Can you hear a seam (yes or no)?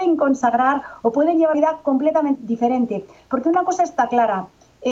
yes